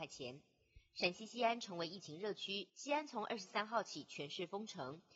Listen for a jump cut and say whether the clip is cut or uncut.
cut